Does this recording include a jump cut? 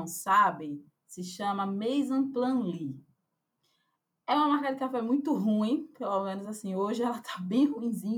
no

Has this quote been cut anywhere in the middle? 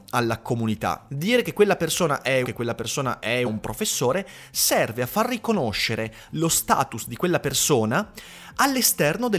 yes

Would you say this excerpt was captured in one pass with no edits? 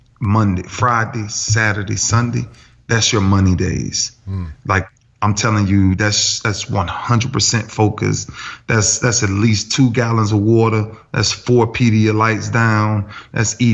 yes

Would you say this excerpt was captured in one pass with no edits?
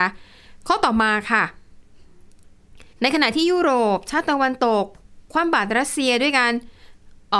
no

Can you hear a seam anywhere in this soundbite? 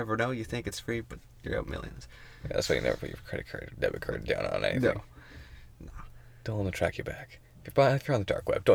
no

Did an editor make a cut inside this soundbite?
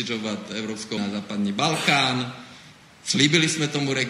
yes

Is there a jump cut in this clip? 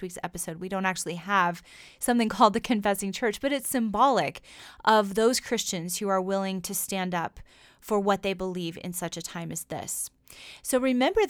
no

